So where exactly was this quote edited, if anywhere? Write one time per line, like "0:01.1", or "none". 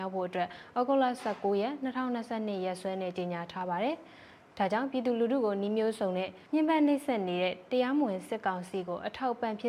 0:06.5